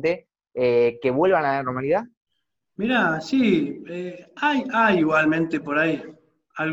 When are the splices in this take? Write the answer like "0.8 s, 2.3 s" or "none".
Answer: 2.3 s